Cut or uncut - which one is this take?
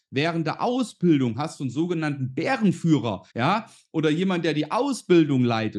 cut